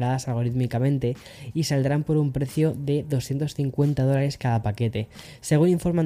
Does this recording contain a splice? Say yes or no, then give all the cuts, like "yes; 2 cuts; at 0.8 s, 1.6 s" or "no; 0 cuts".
no; 0 cuts